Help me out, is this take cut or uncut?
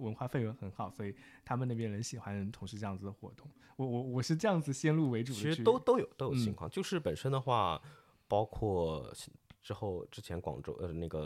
uncut